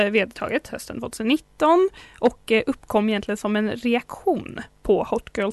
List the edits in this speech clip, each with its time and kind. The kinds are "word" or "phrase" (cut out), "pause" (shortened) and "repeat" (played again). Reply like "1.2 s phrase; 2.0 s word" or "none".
none